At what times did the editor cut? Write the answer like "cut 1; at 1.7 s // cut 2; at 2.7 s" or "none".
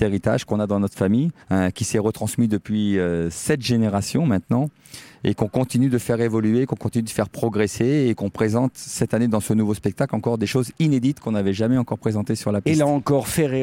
cut 1; at 1.4 s